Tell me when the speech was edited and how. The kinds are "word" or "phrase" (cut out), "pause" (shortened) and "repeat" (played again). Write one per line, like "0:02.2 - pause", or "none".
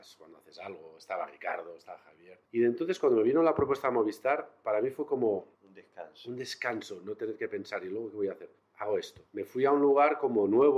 0:02.4 - pause
0:05.5 - pause
0:08.6 - pause
0:09.3 - pause